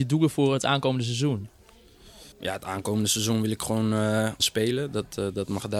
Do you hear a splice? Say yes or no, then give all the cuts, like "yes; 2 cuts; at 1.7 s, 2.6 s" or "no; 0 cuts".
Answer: yes; 2 cuts; at 2.3 s, 4.4 s